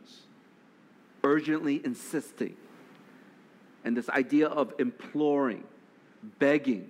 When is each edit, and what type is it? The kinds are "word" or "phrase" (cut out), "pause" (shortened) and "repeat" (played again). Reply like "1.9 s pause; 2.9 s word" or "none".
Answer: none

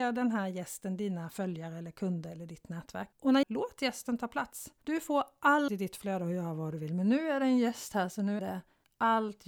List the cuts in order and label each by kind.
3.1 s pause; 3.4 s phrase; 4.8 s pause; 5.7 s phrase; 8.4 s word

